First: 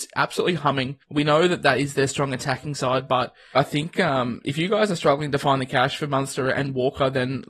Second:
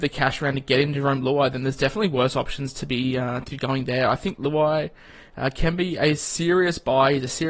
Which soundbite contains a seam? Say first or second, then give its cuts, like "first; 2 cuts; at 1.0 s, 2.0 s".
first; 2 cuts; at 1.0 s, 3.5 s